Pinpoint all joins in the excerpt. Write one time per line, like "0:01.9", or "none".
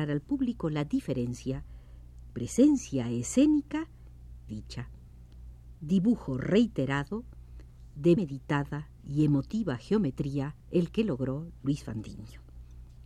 0:02.3
0:04.5
0:08.2
0:09.0
0:10.6